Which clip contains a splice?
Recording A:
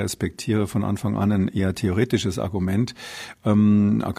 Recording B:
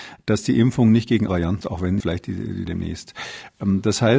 B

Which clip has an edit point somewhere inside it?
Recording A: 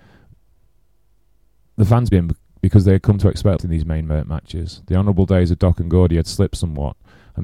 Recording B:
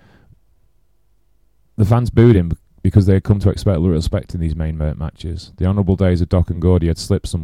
A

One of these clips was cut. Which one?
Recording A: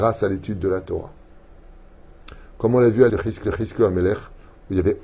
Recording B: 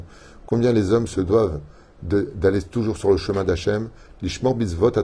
A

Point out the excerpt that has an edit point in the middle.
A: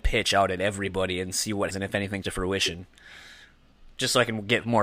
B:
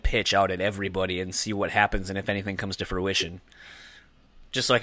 A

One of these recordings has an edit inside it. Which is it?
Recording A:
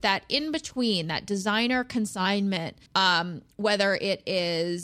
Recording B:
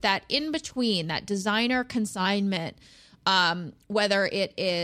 A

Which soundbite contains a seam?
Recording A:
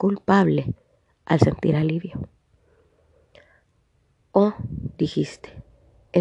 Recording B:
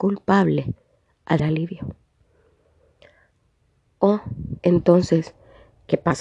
B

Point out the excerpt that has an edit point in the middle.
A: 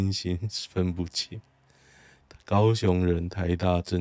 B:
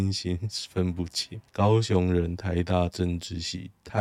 B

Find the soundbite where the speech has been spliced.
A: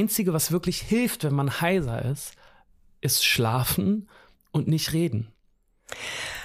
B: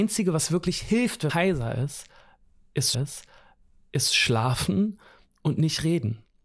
B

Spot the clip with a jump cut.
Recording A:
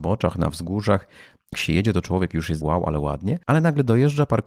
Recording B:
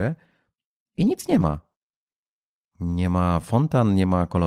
A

